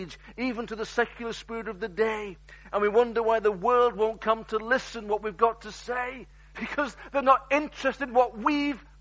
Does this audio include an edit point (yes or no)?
no